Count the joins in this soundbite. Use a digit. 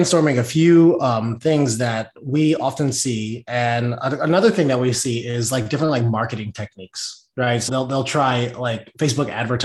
1